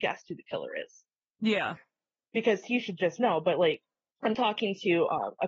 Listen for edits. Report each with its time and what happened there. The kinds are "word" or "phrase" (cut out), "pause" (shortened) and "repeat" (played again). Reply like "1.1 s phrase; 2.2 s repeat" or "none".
none